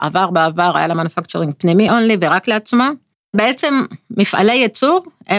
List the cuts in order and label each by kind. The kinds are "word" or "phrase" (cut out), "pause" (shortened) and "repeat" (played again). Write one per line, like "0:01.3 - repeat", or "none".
none